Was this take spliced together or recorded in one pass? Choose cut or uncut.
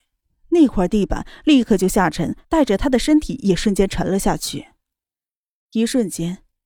cut